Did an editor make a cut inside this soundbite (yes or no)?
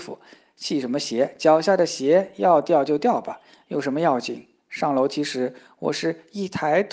no